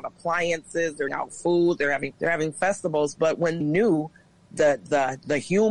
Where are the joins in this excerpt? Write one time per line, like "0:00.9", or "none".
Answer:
0:01.1
0:02.1
0:03.6